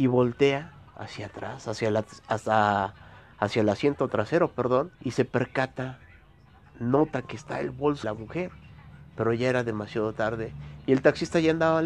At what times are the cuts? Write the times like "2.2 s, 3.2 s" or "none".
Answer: 4.9 s, 8.0 s